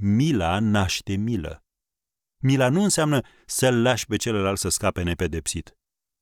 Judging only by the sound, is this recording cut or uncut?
uncut